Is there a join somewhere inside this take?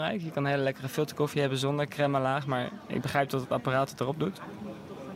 no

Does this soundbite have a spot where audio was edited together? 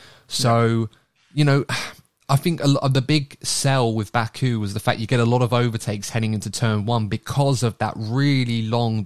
no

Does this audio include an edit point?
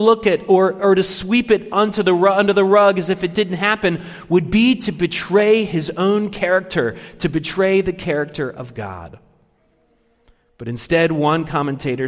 no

